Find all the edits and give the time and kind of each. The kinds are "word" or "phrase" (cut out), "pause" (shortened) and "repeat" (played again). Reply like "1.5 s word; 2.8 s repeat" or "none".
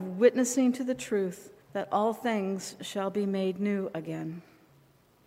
1.6 s pause